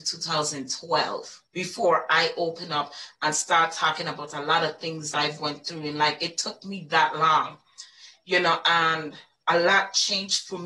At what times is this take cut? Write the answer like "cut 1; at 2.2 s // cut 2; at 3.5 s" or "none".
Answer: cut 1; at 1.5 s // cut 2; at 5.1 s